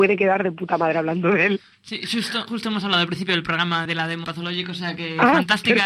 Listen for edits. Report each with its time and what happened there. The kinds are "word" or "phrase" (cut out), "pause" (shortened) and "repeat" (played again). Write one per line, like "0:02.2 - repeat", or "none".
0:02.5 - word
0:03.8 - word
0:04.2 - word